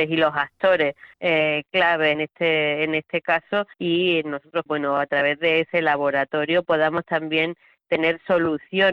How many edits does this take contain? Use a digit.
4